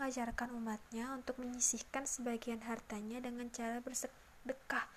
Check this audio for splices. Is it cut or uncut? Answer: uncut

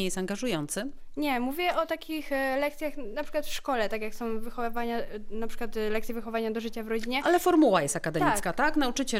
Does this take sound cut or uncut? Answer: uncut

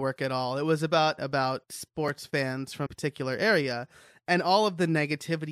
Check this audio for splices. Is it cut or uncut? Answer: cut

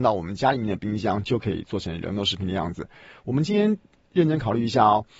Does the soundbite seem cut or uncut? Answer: uncut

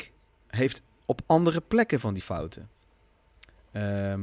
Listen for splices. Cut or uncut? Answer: cut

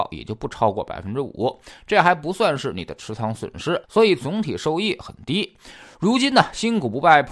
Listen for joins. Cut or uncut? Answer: cut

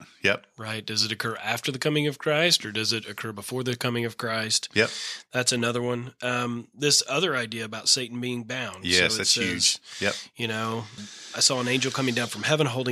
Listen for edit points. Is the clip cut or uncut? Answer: cut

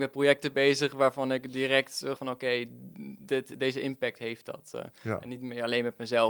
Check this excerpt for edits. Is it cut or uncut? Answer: cut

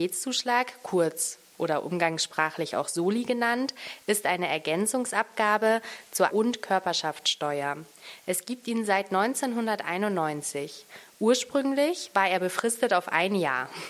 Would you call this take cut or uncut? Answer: cut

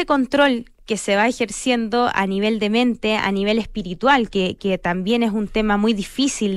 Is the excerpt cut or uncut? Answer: uncut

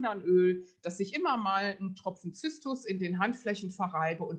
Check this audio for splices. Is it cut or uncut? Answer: uncut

